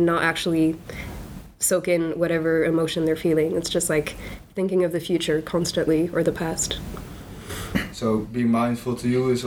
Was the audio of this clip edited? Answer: no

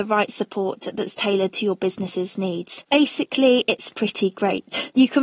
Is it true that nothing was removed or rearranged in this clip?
yes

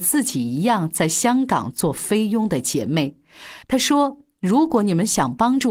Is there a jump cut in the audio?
yes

